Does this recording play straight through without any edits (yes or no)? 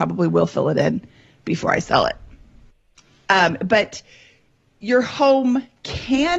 yes